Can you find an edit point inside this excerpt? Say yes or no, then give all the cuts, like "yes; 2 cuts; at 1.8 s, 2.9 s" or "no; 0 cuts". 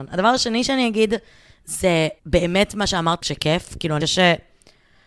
yes; 3 cuts; at 2.2 s, 3.2 s, 4.0 s